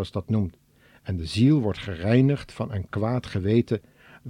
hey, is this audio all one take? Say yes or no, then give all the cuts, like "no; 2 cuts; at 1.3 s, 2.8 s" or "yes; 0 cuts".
yes; 0 cuts